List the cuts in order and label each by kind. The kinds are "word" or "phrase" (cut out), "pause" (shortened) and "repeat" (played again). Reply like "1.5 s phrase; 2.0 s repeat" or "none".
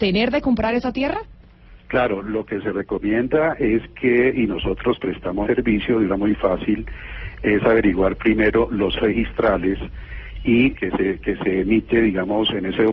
1.8 s pause; 5.4 s word; 6.1 s phrase; 9.0 s word; 10.7 s phrase